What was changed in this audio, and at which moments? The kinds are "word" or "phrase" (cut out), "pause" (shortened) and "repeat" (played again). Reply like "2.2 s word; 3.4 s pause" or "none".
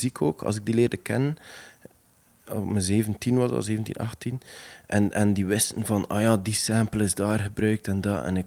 none